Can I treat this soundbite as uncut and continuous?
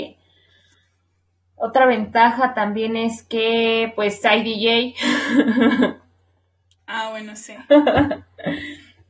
yes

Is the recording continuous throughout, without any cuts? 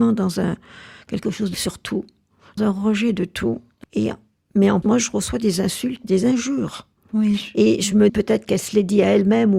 no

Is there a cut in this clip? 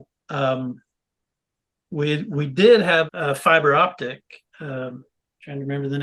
yes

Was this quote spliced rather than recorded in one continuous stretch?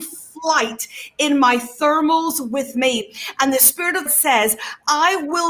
yes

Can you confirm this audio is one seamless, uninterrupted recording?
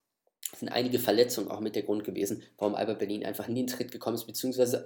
no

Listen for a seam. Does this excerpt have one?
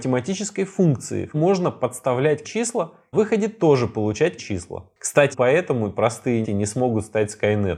yes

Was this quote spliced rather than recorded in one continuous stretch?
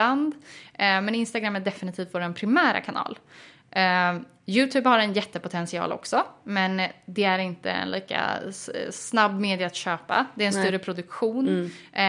no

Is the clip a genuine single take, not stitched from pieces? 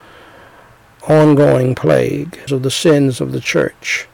no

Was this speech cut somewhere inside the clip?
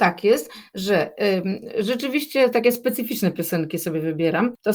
no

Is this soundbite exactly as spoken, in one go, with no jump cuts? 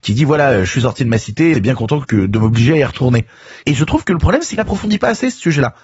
no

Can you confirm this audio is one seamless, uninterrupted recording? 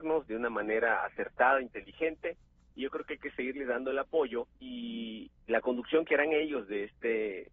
no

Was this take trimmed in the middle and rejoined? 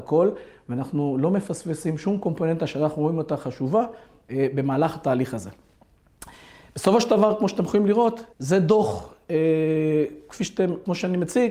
yes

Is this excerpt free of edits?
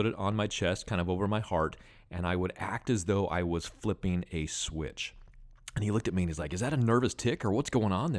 yes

